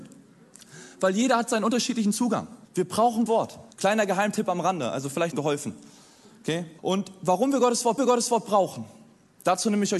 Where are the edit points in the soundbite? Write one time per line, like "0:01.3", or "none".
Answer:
0:02.6
0:03.3
0:03.7
0:05.3
0:06.8
0:08.0